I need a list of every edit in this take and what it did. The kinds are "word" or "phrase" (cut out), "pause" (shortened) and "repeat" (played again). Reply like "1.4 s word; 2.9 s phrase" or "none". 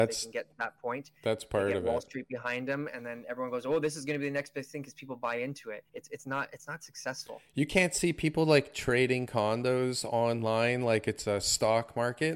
5.9 s pause